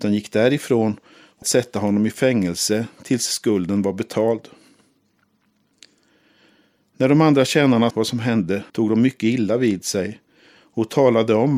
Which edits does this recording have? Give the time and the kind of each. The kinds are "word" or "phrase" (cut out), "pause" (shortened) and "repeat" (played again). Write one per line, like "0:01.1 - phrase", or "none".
0:01.4 - word
0:07.9 - word
0:08.7 - pause